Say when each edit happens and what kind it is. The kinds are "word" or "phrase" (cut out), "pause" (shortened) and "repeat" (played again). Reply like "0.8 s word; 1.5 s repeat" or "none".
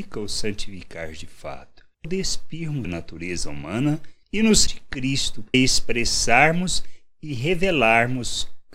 2.0 s word; 2.8 s word; 4.7 s word; 5.5 s word